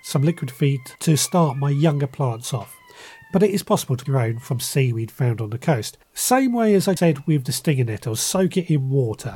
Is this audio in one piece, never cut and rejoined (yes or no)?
no